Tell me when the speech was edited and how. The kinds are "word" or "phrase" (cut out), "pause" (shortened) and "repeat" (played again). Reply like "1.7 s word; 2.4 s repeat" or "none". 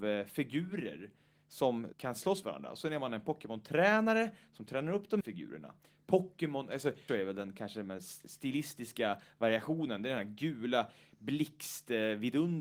1.9 s word; 2.4 s word; 5.2 s word; 7.1 s word